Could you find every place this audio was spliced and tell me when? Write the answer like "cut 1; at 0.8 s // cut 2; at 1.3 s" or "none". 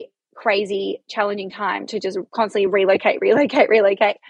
none